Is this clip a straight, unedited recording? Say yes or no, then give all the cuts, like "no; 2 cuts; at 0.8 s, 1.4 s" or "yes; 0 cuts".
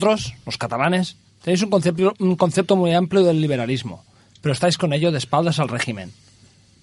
yes; 0 cuts